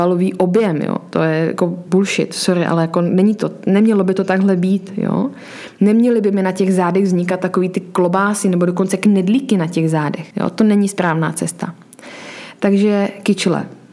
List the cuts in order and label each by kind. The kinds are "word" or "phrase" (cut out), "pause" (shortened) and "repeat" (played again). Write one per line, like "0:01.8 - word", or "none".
0:10.3 - pause